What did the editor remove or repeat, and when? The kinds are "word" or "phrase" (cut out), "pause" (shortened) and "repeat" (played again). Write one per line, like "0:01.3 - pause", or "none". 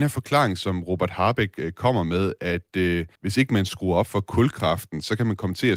0:03.2 - pause